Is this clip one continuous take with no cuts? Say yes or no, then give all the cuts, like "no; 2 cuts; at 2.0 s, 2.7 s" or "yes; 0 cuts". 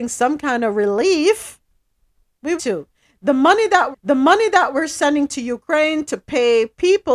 no; 2 cuts; at 2.6 s, 3.9 s